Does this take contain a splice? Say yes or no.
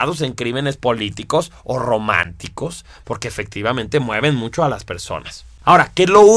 no